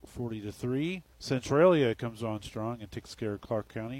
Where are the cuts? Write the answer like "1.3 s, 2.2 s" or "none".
1.1 s

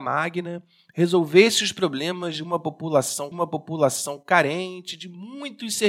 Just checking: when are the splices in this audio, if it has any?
3.3 s

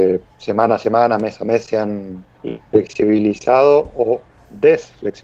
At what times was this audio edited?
none

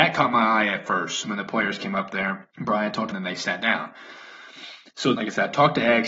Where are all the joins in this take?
1.2 s, 2.5 s, 3.1 s, 5.1 s

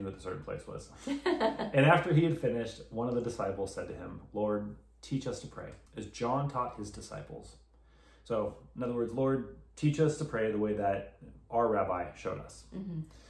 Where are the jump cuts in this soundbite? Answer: 5.9 s

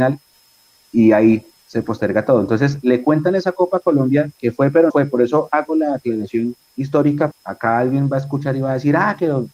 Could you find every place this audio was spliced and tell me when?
4.9 s, 7.3 s

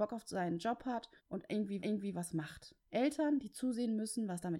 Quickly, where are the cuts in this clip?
1.2 s, 1.8 s, 2.8 s

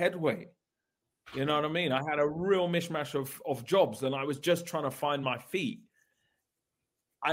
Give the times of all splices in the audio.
none

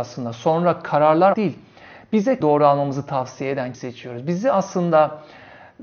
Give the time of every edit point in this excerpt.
1.3 s, 2.4 s, 3.7 s

